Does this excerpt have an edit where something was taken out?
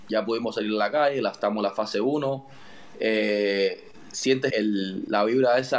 yes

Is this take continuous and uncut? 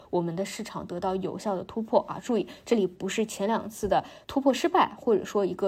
no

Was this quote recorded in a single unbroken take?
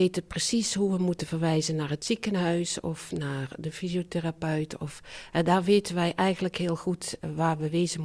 yes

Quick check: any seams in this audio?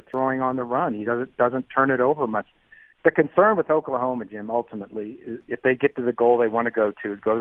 no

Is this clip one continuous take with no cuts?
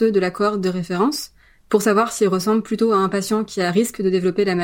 yes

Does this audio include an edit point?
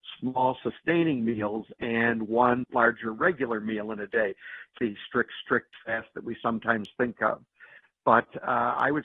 yes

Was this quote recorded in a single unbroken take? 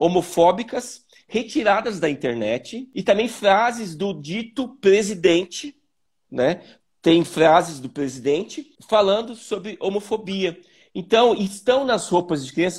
yes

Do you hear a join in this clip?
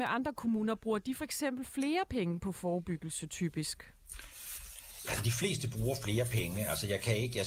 no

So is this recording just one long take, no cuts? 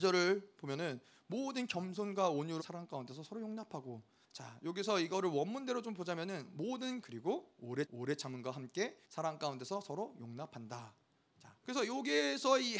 no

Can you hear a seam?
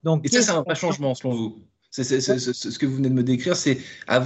no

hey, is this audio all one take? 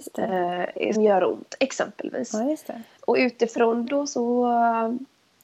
no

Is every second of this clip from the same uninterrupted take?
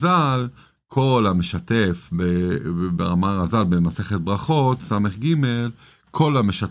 yes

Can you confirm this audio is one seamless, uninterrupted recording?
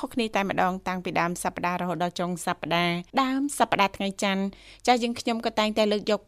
no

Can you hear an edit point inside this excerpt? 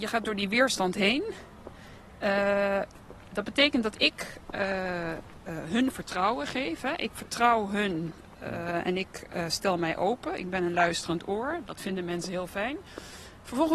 no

